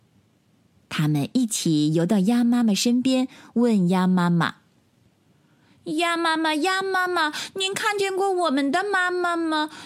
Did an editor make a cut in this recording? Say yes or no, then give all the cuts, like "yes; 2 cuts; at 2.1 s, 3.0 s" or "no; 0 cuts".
no; 0 cuts